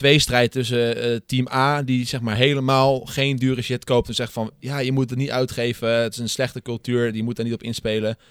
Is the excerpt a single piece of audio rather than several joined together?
yes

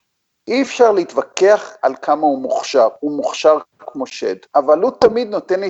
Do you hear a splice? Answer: yes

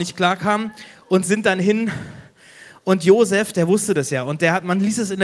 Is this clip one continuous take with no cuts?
yes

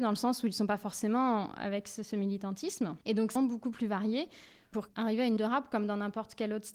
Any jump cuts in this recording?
yes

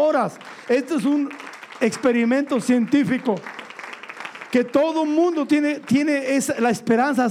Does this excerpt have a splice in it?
no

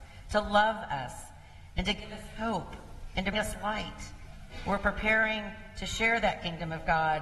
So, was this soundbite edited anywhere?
yes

